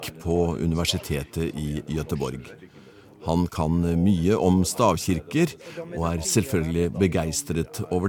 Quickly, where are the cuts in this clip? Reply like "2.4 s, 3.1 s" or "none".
none